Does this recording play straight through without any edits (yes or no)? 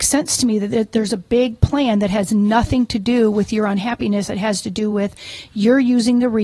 yes